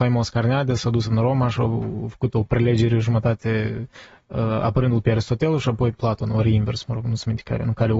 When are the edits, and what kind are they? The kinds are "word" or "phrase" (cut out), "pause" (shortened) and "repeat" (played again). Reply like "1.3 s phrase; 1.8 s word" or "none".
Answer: 5.9 s word

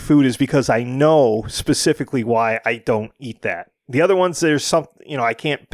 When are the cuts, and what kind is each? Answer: none

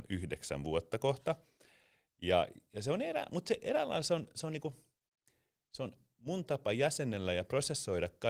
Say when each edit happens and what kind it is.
none

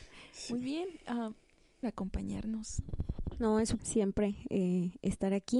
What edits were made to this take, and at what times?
1.8 s phrase; 3.8 s word

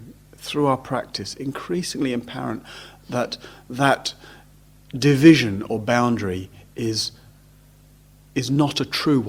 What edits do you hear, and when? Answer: none

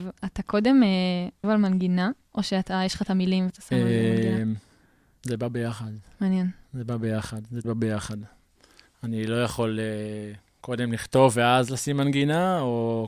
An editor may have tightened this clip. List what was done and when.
1.4 s word; 3.5 s word; 7.6 s word

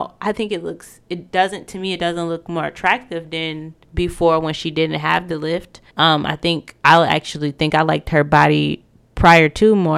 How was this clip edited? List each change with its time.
3.8 s pause; 5.9 s pause; 6.8 s pause

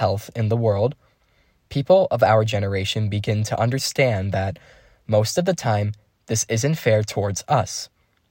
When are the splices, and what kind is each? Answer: none

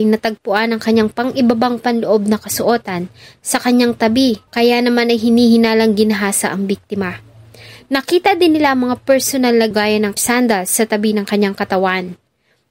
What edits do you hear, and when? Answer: 4.5 s pause; 9.7 s phrase; 10.2 s phrase

